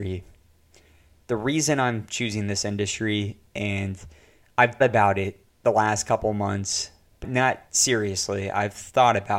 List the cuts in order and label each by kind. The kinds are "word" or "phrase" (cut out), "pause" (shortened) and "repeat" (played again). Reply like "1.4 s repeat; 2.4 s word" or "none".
4.8 s word; 7.2 s word